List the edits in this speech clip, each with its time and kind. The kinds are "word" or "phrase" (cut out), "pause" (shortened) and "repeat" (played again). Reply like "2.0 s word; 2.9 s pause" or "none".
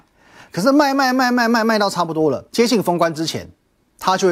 2.5 s pause